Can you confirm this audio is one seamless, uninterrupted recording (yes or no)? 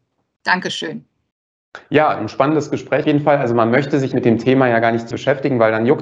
no